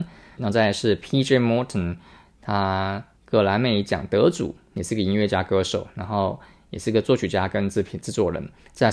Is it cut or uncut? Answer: cut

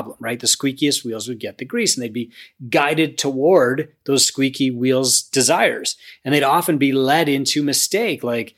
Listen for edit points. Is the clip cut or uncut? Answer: uncut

